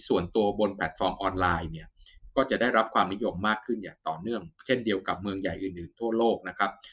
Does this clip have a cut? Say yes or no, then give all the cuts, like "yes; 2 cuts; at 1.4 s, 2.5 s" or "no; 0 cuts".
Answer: yes; 1 cut; at 4.6 s